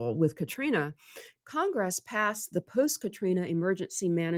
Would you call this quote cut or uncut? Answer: uncut